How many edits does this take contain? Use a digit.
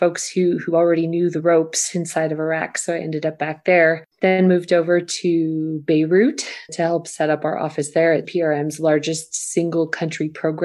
3